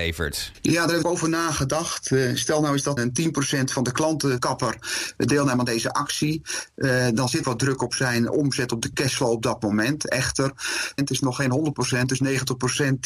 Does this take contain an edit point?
yes; 5 cuts; at 1.0 s, 3.0 s, 4.4 s, 7.4 s, 11.0 s

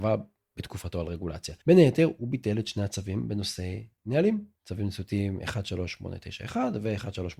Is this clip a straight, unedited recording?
no; 2 cuts; at 1.6 s, 4.5 s

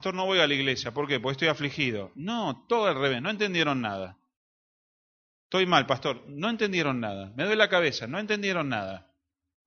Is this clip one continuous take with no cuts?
yes; 0 cuts

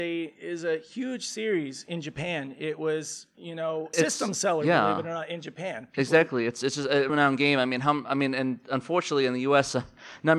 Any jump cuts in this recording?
yes; 2 cuts; at 3.9 s, 7.1 s

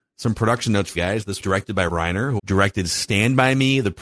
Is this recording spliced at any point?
yes; 4 cuts; at 0.9 s, 1.4 s, 1.9 s, 2.4 s

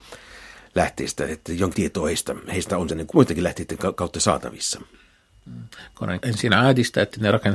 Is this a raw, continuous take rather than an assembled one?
no; 4 cuts; at 1.3 s, 1.7 s, 2.9 s, 6.2 s

